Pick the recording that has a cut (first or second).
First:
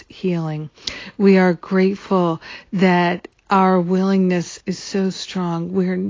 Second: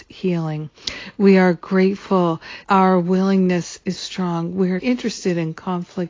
second